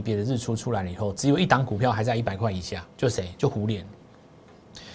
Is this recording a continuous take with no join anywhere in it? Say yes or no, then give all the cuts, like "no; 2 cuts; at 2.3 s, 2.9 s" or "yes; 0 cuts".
no; 1 cut; at 2.9 s